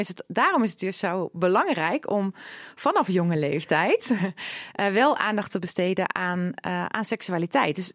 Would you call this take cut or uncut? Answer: uncut